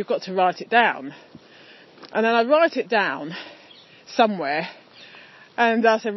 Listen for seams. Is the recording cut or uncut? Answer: uncut